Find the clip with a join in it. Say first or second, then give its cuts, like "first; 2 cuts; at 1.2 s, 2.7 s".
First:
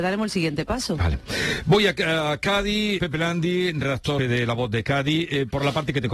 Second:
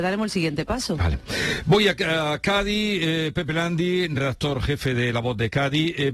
first; 2 cuts; at 3.0 s, 4.2 s